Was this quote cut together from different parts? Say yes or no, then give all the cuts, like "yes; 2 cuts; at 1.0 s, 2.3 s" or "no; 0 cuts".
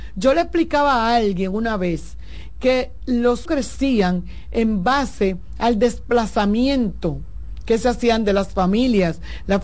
yes; 1 cut; at 3.5 s